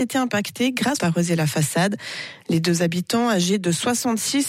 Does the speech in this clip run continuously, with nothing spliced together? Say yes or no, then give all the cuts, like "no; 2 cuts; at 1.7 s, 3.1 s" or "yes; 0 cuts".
no; 1 cut; at 1.0 s